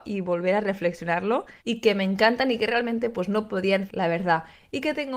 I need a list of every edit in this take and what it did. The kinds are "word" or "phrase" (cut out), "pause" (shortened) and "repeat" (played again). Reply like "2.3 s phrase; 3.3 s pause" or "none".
1.6 s pause; 3.9 s phrase